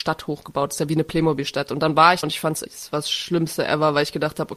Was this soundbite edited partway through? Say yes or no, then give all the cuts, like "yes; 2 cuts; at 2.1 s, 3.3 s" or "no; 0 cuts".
yes; 2 cuts; at 2.2 s, 2.6 s